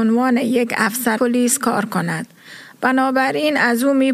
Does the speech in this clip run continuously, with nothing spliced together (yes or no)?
no